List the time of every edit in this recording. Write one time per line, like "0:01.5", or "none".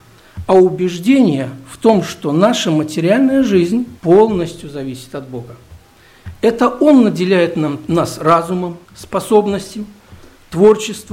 0:04.0
0:08.9